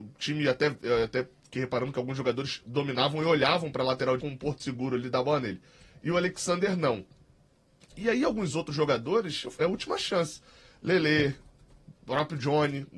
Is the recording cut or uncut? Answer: cut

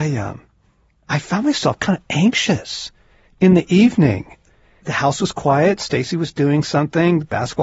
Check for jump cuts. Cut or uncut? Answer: uncut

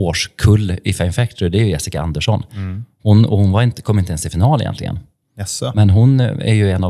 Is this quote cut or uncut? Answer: uncut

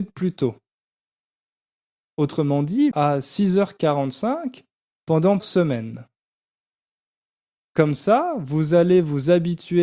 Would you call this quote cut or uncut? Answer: cut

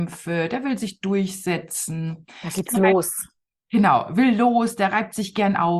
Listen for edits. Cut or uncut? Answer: uncut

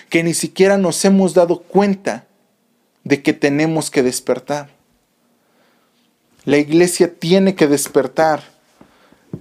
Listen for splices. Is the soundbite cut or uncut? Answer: uncut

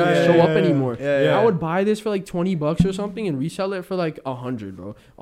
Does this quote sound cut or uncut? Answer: uncut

